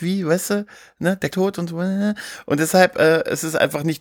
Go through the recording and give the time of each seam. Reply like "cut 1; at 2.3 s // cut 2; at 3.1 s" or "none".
cut 1; at 1.3 s